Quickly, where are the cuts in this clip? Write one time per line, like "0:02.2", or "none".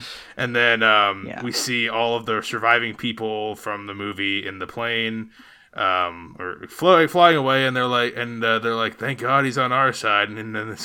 none